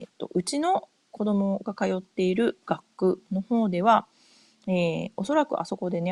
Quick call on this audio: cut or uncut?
uncut